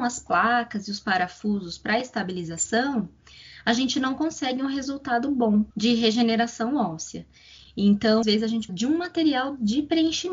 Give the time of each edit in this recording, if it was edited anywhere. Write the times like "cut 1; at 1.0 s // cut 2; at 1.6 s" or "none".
cut 1; at 5.7 s // cut 2; at 8.2 s // cut 3; at 8.7 s